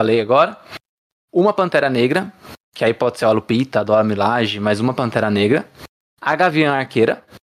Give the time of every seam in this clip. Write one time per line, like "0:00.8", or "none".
none